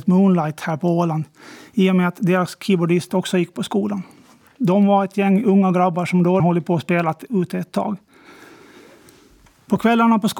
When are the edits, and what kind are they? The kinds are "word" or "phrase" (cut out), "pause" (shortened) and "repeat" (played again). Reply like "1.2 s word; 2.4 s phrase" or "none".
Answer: 6.4 s word